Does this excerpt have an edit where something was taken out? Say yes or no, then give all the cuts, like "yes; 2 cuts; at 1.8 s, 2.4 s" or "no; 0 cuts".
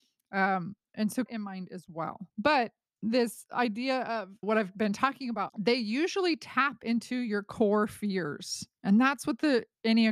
yes; 4 cuts; at 1.3 s, 2.3 s, 4.4 s, 5.5 s